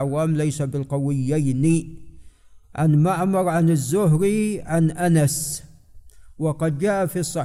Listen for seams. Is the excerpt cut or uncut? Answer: uncut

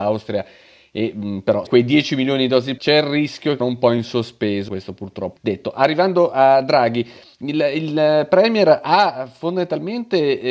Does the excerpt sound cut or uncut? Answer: cut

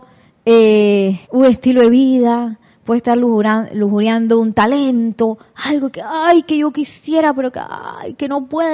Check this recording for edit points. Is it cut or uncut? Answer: cut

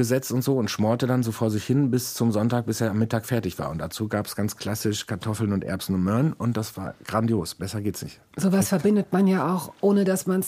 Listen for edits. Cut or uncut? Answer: uncut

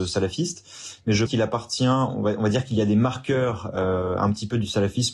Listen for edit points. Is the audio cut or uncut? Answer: cut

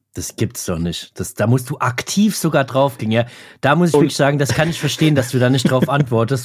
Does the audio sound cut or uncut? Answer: uncut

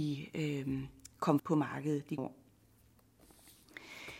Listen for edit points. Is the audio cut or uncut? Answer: cut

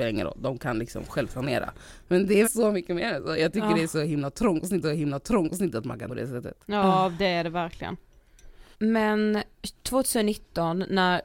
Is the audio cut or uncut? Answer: cut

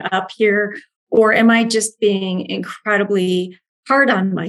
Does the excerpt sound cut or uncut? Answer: uncut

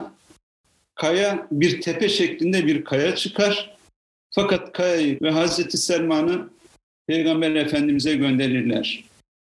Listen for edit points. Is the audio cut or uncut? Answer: cut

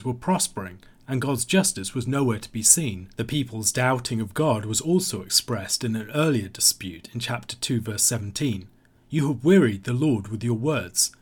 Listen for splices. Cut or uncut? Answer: cut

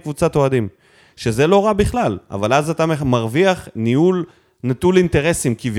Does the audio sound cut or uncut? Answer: uncut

